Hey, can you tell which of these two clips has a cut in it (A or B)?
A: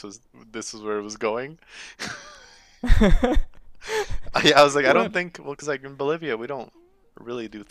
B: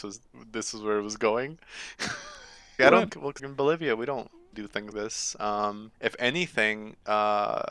B